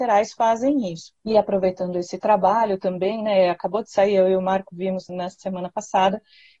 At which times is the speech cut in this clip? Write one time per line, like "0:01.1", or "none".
0:01.2
0:05.1

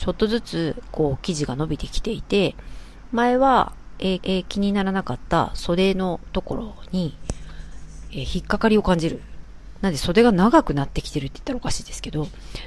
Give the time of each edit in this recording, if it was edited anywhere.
0:04.2

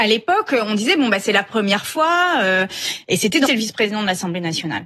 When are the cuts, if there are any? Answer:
0:03.5

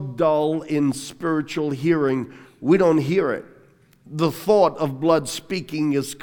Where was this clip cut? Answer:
none

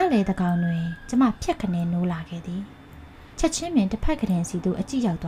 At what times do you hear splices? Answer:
0:03.3

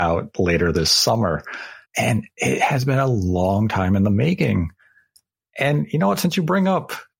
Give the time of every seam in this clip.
0:01.8

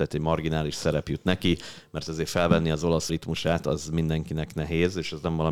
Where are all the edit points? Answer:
0:03.1

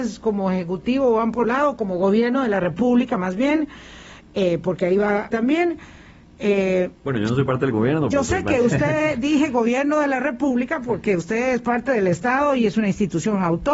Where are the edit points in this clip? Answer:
0:01.4
0:05.3

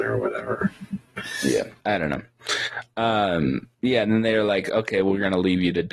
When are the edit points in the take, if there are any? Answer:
0:01.8
0:03.7

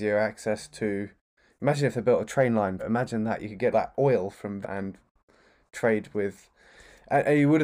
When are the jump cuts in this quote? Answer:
0:02.8
0:03.7
0:04.6

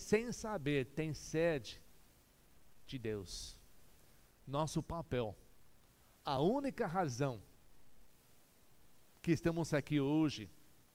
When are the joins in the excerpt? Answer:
none

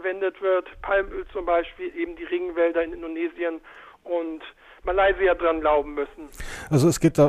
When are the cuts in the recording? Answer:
none

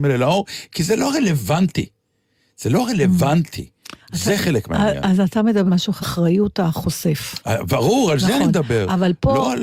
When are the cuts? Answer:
0:04.0
0:05.7
0:06.0

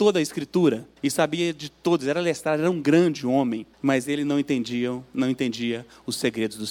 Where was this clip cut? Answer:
0:01.0
0:03.7

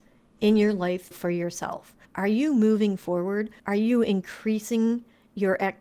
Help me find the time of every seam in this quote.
0:01.1
0:02.0
0:03.6

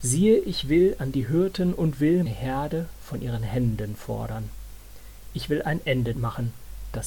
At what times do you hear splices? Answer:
0:02.3
0:06.1

